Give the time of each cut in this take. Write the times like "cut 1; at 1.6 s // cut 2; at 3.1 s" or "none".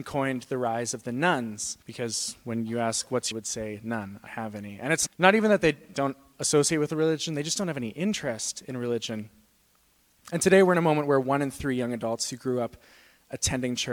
cut 1; at 1.8 s // cut 2; at 3.3 s // cut 3; at 4.3 s // cut 4; at 5.1 s // cut 5; at 5.9 s

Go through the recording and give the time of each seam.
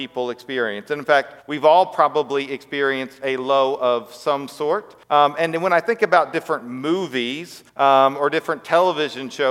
cut 1; at 1.4 s // cut 2; at 5.0 s // cut 3; at 7.7 s

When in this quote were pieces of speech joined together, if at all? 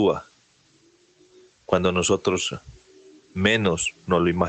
none

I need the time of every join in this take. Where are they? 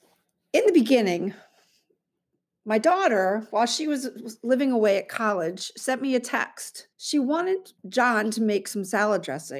cut 1; at 6.9 s // cut 2; at 7.8 s

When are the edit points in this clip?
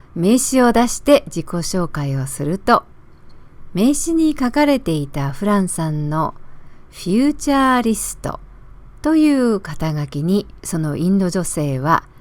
cut 1; at 9.0 s // cut 2; at 10.6 s

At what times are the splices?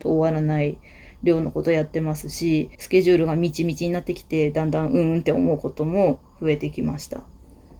cut 1; at 2.7 s

